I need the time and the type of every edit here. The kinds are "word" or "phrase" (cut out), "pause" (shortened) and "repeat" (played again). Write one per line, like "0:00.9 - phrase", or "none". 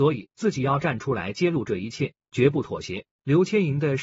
0:03.1 - pause